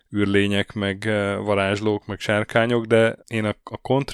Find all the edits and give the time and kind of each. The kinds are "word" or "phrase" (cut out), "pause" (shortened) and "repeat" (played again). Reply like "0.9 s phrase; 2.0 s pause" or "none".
3.2 s pause